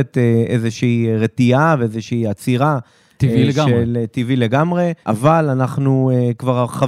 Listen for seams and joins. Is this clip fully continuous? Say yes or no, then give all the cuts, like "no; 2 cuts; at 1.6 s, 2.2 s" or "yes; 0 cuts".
no; 1 cut; at 5.0 s